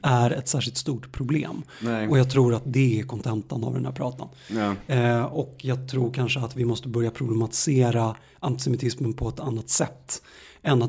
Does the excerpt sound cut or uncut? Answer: uncut